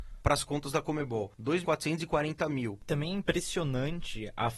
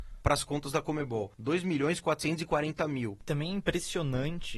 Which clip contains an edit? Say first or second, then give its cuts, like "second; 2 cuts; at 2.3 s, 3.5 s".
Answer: first; 1 cut; at 1.6 s